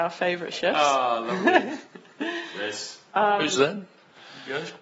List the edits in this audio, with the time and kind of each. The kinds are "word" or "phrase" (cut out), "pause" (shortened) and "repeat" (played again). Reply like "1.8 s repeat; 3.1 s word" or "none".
1.9 s pause; 3.6 s phrase